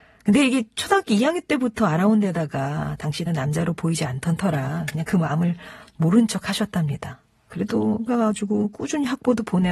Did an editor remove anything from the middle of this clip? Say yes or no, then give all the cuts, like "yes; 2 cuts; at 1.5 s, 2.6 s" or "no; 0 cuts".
yes; 2 cuts; at 3.3 s, 8.1 s